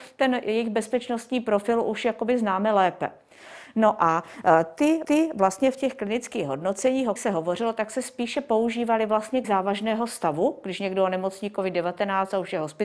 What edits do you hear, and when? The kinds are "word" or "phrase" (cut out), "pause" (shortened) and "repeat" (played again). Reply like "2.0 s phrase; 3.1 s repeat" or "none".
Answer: 5.0 s repeat; 7.2 s word; 9.4 s word